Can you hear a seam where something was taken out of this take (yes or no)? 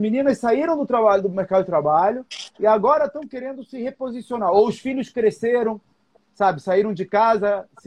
no